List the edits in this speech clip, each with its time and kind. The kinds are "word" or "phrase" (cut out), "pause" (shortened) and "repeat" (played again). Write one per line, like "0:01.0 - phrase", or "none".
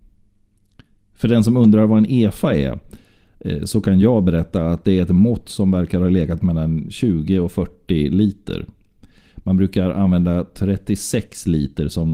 none